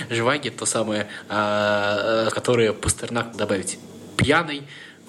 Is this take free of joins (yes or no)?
no